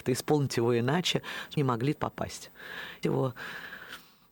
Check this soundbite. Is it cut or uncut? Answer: cut